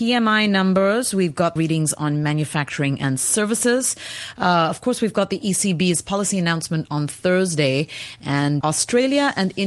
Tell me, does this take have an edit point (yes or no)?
yes